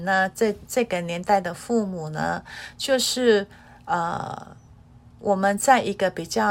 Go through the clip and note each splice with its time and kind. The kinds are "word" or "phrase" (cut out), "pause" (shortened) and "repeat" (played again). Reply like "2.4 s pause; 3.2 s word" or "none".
none